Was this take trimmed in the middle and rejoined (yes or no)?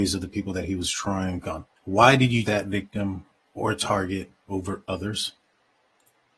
yes